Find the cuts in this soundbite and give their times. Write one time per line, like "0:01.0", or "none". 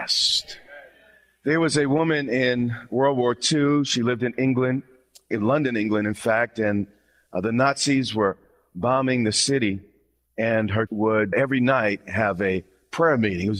0:05.3
0:10.9
0:11.3